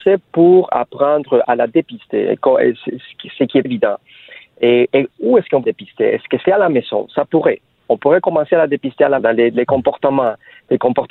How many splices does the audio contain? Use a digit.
5